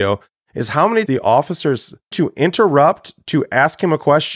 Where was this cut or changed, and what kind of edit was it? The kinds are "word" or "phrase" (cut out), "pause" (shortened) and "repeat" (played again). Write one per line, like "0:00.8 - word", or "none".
0:01.1 - word
0:02.1 - word